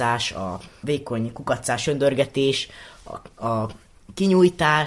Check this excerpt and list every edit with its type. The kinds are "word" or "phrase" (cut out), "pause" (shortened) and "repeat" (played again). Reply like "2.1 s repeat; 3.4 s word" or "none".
none